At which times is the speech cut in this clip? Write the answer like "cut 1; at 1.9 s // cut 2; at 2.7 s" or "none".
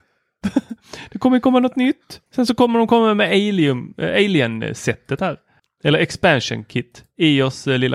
cut 1; at 2.3 s